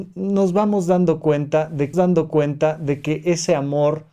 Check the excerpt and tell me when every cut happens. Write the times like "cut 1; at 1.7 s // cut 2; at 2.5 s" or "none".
cut 1; at 1.9 s